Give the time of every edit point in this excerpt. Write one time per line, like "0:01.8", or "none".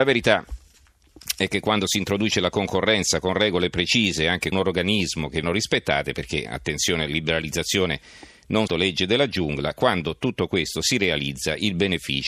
0:04.5
0:05.4
0:06.4
0:08.7